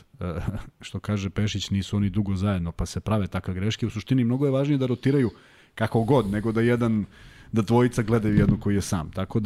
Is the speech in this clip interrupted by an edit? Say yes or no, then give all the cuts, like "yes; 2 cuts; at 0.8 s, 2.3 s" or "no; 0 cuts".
no; 0 cuts